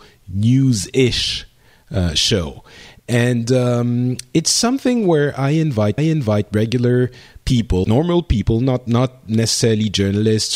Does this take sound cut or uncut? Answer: cut